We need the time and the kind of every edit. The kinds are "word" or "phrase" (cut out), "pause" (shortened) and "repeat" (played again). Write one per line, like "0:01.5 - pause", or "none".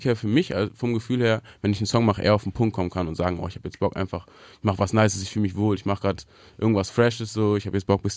none